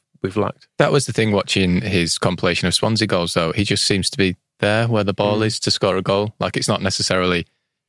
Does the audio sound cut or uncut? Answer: uncut